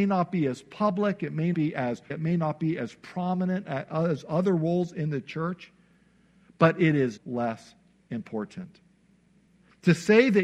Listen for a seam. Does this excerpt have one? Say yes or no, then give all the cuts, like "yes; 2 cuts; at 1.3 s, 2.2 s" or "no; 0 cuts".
yes; 3 cuts; at 1.5 s, 2.1 s, 7.2 s